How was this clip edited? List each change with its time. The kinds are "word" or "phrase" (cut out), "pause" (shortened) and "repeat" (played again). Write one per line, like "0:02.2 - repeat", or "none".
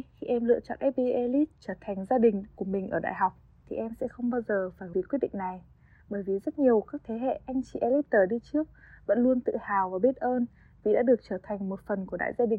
0:04.9 - word